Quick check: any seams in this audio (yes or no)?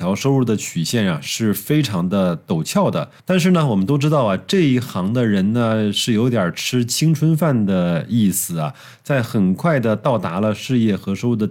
yes